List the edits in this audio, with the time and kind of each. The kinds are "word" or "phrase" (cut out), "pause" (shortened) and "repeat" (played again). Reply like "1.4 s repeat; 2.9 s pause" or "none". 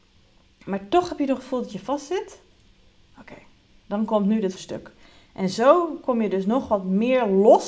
4.6 s word